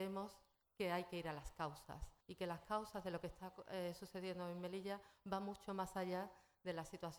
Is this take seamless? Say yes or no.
no